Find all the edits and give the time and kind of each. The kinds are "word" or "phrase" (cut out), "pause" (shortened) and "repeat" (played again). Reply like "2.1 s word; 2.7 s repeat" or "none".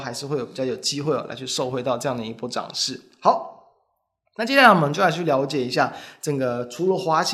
none